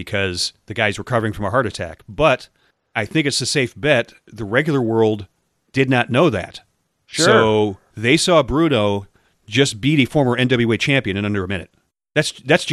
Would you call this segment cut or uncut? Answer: uncut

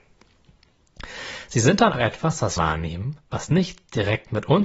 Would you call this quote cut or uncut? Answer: cut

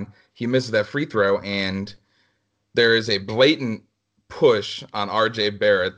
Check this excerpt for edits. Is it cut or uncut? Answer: uncut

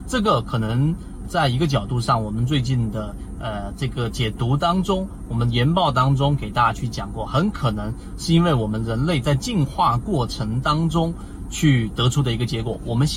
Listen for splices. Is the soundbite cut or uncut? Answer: cut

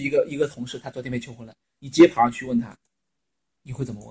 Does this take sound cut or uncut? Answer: uncut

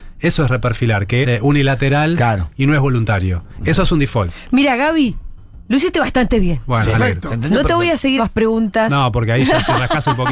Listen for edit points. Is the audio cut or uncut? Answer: cut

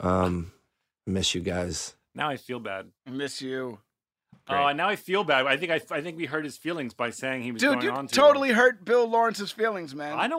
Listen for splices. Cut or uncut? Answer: cut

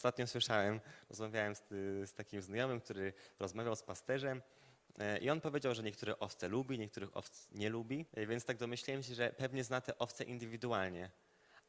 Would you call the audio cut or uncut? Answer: cut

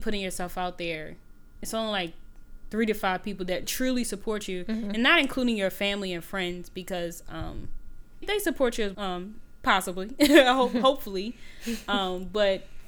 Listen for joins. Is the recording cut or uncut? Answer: cut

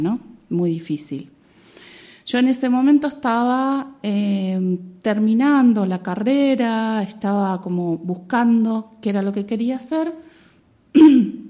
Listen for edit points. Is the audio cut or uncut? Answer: uncut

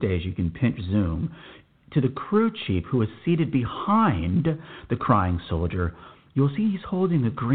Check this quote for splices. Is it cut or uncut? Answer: uncut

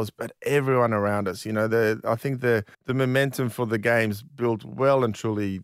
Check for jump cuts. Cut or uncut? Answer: cut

